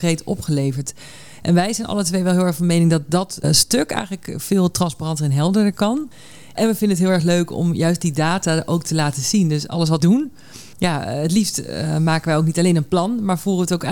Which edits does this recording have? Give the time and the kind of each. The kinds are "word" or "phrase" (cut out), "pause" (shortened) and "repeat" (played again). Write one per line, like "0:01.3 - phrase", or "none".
0:03.4 - word
0:10.0 - word